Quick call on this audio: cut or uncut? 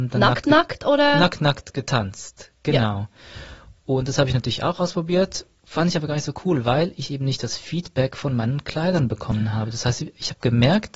uncut